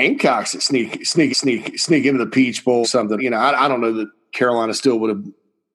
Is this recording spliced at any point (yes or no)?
yes